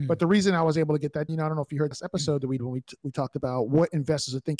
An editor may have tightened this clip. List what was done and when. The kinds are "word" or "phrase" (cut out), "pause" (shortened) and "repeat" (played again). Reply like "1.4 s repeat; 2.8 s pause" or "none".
1.3 s word; 1.9 s word; 2.6 s word